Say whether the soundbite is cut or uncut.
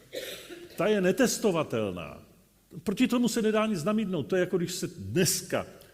uncut